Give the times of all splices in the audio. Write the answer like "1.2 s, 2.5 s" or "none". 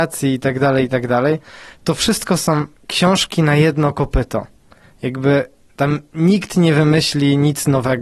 2.7 s